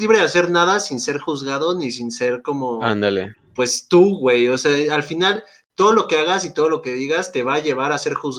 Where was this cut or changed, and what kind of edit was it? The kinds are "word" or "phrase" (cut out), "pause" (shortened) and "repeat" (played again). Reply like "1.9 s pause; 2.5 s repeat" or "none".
none